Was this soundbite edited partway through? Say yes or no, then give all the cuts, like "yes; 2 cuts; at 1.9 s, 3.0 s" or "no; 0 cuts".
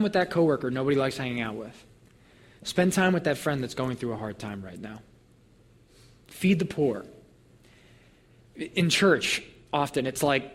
no; 0 cuts